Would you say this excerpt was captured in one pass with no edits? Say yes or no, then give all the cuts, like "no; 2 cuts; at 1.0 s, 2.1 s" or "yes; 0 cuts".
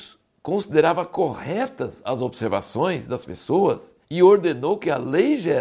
no; 1 cut; at 4.0 s